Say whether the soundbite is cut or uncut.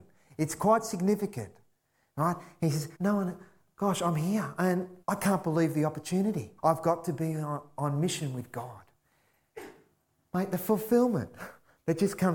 cut